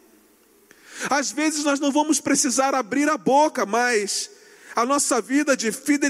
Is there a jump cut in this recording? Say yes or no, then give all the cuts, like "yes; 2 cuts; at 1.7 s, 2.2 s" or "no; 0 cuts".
no; 0 cuts